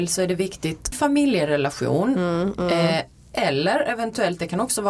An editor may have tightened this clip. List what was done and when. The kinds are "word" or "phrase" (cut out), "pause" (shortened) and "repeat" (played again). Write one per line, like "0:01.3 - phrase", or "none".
0:00.9 - phrase